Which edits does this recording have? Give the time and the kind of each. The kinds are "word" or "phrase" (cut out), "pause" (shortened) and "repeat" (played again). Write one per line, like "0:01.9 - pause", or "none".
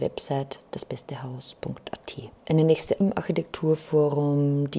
0:02.4 - pause
0:03.0 - word